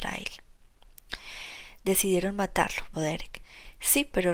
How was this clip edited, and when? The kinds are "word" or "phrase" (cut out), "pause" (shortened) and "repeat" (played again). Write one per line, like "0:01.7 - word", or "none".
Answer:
0:02.9 - word